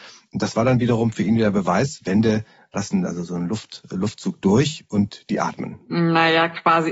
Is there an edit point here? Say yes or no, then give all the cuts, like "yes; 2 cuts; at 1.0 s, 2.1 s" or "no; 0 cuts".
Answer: no; 0 cuts